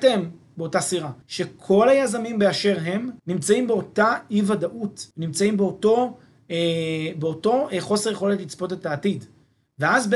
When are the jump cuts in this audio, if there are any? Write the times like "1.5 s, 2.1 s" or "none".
1.2 s, 3.2 s, 5.1 s

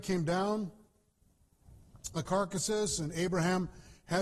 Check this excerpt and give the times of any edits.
2.1 s

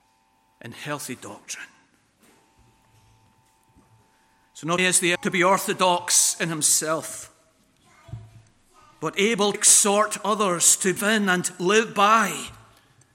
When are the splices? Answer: 4.8 s, 5.2 s, 9.5 s, 11.0 s

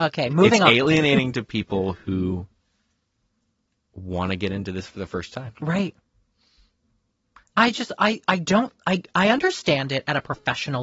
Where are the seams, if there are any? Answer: none

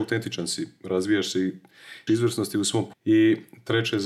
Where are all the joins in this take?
2.1 s, 2.9 s

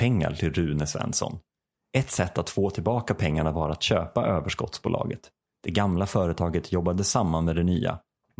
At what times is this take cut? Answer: none

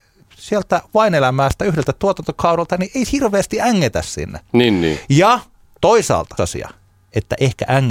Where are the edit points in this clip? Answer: 3.1 s, 6.4 s

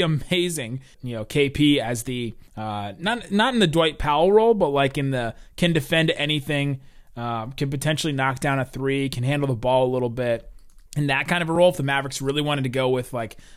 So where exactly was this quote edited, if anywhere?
0.9 s, 2.5 s, 10.9 s

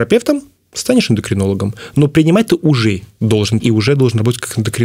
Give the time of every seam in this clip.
3.6 s

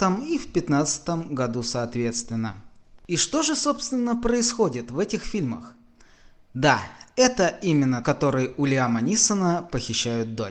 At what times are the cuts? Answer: 8.0 s

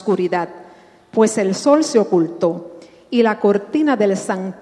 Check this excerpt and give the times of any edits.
none

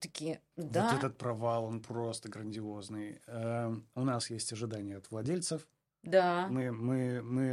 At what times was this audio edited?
none

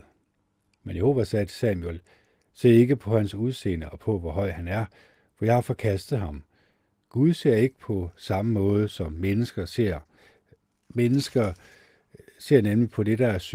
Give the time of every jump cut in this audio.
none

